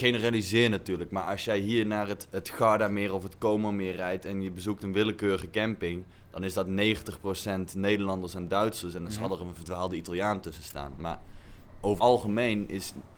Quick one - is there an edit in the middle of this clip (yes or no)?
yes